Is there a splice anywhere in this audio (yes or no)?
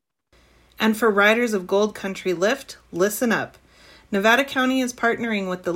no